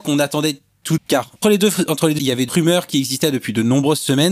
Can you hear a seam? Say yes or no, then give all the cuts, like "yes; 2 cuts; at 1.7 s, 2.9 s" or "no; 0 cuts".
yes; 4 cuts; at 1.0 s, 1.4 s, 2.2 s, 2.5 s